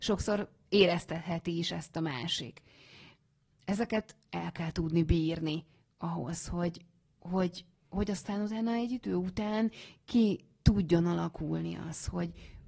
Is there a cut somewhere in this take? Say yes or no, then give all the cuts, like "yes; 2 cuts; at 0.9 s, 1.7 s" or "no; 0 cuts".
no; 0 cuts